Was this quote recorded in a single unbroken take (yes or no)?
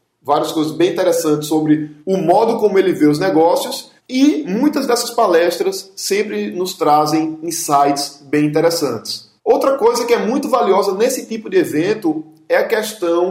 no